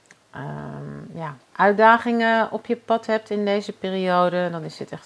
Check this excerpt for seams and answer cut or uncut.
cut